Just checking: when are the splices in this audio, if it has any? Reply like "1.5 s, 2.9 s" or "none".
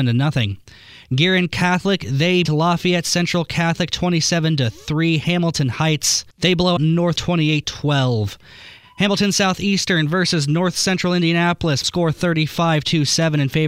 2.4 s, 6.3 s, 6.8 s, 7.2 s, 7.6 s, 11.8 s